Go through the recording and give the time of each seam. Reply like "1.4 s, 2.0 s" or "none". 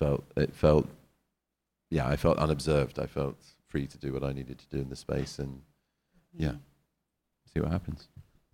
none